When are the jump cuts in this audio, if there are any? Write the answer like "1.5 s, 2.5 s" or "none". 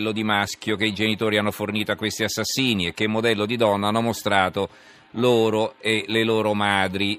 none